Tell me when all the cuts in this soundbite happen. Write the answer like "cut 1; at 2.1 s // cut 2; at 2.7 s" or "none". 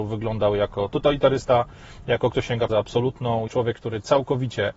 cut 1; at 2.3 s // cut 2; at 2.7 s // cut 3; at 3.5 s